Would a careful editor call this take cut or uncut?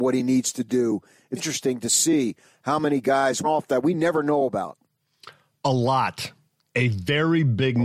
cut